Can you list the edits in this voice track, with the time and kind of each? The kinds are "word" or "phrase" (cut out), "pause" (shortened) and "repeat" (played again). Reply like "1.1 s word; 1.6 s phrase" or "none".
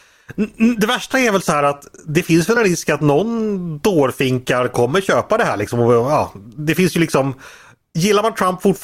none